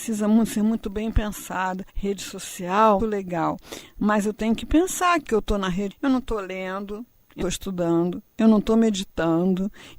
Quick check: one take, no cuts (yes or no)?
no